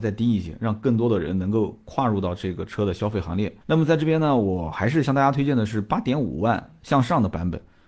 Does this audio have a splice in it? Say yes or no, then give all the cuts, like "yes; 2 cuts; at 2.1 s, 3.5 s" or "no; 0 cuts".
yes; 1 cut; at 3.6 s